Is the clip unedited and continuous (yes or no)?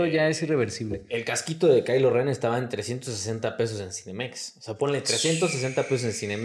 yes